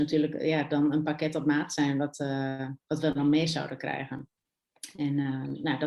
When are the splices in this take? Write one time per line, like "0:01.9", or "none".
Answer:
none